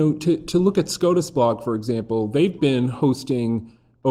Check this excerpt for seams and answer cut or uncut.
uncut